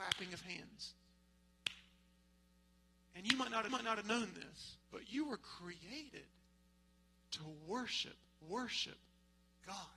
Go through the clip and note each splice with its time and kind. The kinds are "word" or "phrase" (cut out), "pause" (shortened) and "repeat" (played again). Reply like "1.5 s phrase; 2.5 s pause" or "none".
3.7 s repeat; 4.8 s pause; 8.4 s repeat